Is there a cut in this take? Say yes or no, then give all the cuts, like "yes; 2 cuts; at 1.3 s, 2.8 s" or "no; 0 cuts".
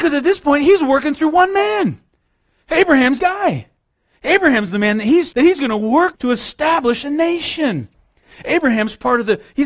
yes; 3 cuts; at 3.2 s, 5.3 s, 6.1 s